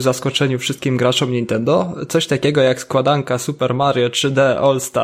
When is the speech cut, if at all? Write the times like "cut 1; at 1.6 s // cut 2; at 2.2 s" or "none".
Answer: none